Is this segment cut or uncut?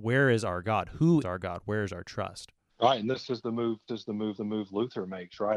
cut